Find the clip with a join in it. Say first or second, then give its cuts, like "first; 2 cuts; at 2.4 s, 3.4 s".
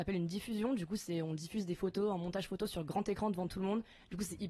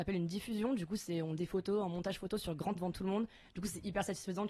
second; 2 cuts; at 1.4 s, 2.8 s